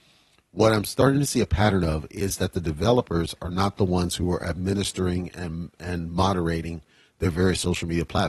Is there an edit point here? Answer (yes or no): no